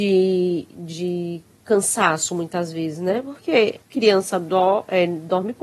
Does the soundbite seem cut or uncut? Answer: cut